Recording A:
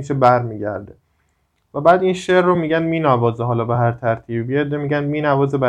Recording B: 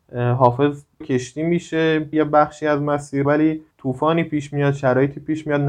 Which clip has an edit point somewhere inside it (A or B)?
B